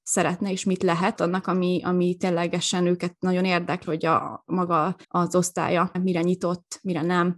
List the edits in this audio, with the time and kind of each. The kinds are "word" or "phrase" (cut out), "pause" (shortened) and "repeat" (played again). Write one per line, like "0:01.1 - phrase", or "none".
0:01.2 - phrase
0:03.8 - word
0:05.0 - pause
0:05.9 - word